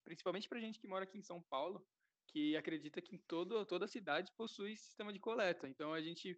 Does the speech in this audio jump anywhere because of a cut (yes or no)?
no